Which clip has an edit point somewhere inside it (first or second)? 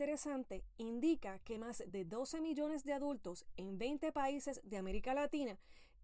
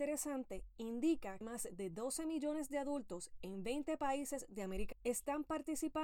second